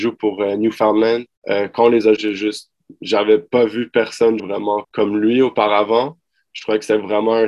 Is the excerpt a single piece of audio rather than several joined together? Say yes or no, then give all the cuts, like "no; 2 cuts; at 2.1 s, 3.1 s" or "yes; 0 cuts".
no; 4 cuts; at 1.3 s, 2.2 s, 4.4 s, 4.8 s